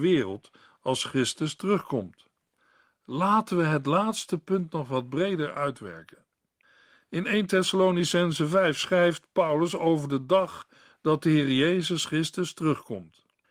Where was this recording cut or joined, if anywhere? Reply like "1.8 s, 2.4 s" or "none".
none